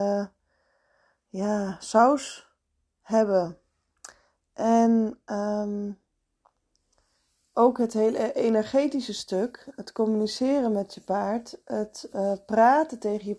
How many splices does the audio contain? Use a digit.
0